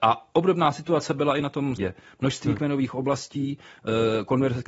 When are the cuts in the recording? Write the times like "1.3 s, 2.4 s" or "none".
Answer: 1.8 s